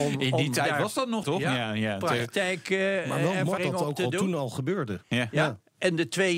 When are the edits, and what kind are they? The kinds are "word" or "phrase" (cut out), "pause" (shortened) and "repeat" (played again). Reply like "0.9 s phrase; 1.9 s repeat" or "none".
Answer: 1.2 s word; 3.6 s word

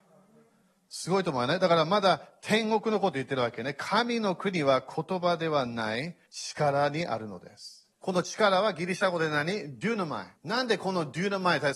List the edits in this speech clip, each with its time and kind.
6.3 s pause; 7.9 s pause; 10.4 s pause

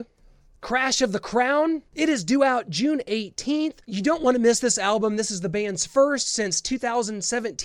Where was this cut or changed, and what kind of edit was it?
1.9 s pause; 3.8 s pause

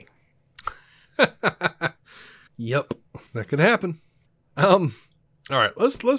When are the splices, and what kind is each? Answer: 3.3 s pause

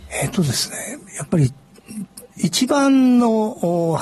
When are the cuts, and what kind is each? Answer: 2.3 s pause

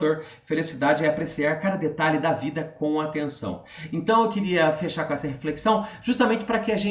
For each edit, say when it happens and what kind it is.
none

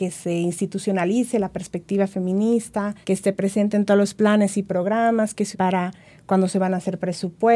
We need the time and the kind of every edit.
3.0 s pause; 5.5 s word

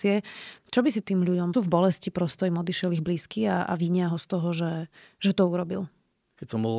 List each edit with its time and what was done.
1.0 s word; 1.5 s phrase

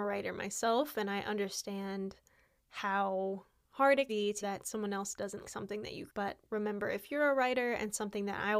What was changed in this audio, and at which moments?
4.1 s word; 4.4 s word; 5.4 s word; 6.1 s word; 6.5 s word

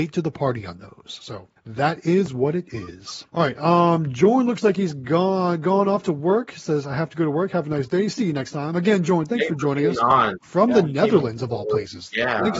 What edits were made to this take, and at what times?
1.6 s pause; 3.3 s pause

